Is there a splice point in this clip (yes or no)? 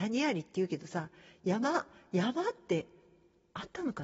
no